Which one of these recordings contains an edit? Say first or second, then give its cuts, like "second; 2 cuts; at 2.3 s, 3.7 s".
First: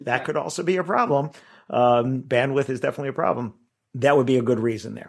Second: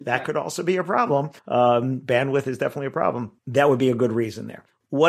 second; 2 cuts; at 1.4 s, 3.4 s